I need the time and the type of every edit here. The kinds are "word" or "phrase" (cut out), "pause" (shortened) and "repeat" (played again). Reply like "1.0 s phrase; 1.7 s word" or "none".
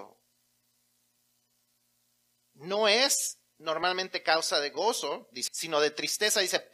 5.5 s word